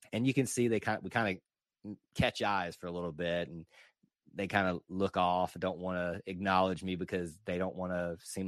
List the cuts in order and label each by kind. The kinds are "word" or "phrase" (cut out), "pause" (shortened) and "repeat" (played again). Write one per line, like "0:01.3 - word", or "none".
none